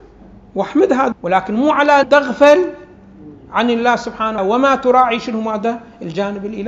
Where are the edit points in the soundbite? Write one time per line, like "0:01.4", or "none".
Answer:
0:01.1
0:02.0
0:04.4